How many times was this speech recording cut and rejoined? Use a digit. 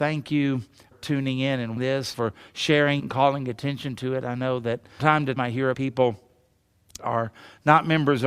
8